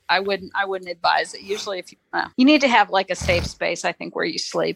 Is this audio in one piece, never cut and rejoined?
no; 1 cut; at 2.3 s

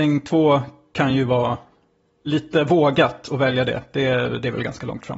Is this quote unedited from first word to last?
yes; 0 cuts

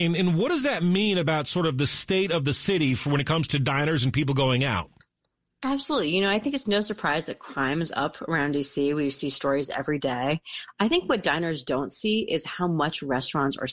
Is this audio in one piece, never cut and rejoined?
yes; 0 cuts

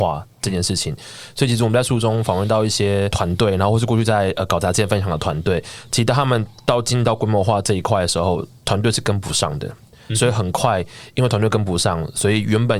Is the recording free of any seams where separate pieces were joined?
yes; 0 cuts

